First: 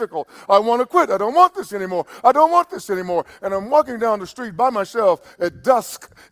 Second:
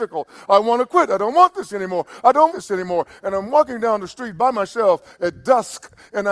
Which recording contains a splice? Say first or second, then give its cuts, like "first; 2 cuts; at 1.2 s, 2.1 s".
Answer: second; 1 cut; at 2.5 s